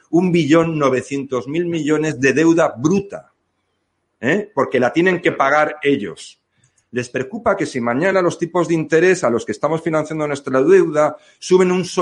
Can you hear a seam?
no; 0 cuts

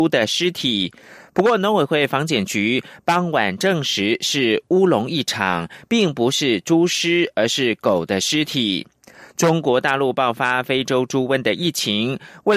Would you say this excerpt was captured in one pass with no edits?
yes; 0 cuts

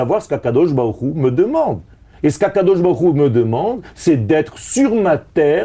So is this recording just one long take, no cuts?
yes; 0 cuts

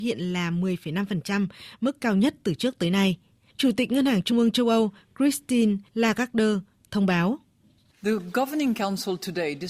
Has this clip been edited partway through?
no; 0 cuts

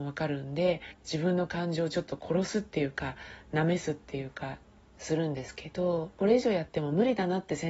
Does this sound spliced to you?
no; 0 cuts

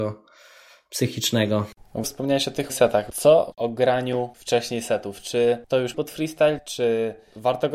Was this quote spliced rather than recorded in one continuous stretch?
yes; 5 cuts; at 2.0 s, 2.7 s, 3.5 s, 4.3 s, 5.9 s

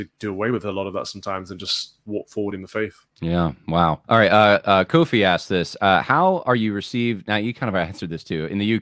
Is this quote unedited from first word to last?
no; 2 cuts; at 3.1 s, 4.0 s

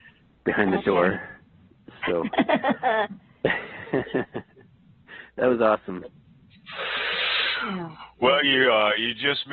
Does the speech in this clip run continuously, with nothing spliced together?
yes; 0 cuts

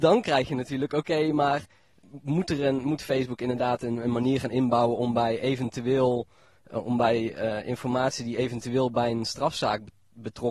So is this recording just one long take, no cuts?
yes; 0 cuts

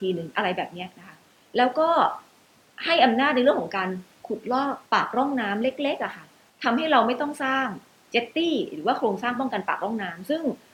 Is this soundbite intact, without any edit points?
no; 1 cut; at 4.9 s

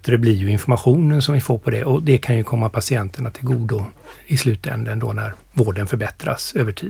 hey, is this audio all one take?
no; 1 cut; at 5.4 s

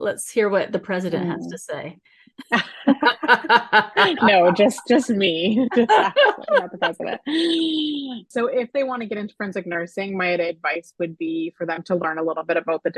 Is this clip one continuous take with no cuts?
yes; 0 cuts

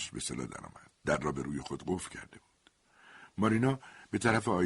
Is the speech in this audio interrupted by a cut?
yes; 1 cut; at 1.0 s

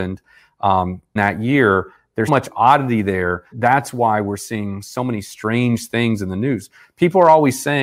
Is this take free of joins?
no; 3 cuts; at 1.2 s, 2.3 s, 3.5 s

